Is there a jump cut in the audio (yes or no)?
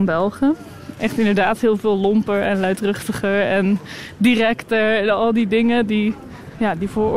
no